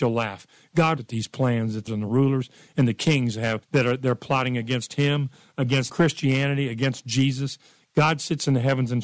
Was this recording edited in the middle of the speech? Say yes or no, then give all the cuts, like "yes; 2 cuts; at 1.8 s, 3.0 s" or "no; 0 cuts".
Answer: yes; 4 cuts; at 1.0 s, 1.9 s, 3.6 s, 5.9 s